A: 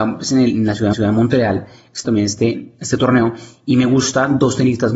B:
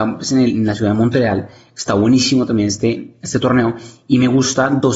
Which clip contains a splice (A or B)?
A